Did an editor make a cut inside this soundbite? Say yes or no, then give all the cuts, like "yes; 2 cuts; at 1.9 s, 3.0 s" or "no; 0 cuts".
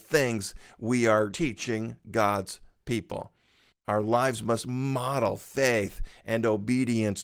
no; 0 cuts